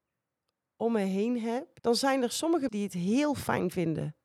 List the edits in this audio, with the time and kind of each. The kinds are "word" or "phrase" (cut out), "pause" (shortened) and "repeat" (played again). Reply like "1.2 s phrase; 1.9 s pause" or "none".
1.8 s pause; 2.7 s word